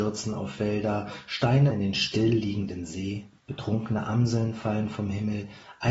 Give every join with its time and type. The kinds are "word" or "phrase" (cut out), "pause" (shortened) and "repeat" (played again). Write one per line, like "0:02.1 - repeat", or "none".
0:01.7 - word
0:03.4 - pause